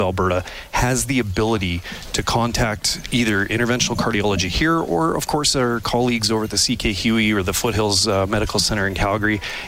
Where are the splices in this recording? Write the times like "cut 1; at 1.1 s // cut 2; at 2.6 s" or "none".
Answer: cut 1; at 3.0 s